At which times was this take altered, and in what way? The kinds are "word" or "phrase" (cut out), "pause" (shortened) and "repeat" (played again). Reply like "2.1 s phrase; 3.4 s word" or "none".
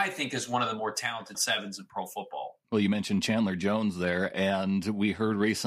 1.3 s word; 2.6 s pause